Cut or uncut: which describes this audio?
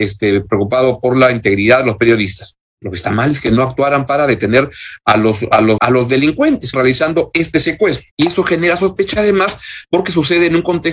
cut